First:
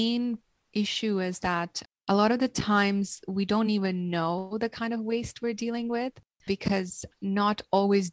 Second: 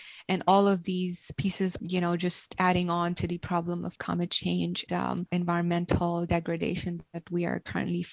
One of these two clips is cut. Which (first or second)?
second